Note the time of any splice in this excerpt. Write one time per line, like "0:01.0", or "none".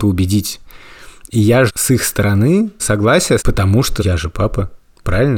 0:01.7
0:02.8
0:03.4
0:04.0